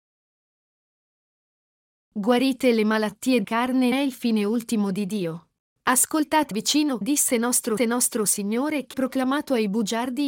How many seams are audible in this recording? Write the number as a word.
six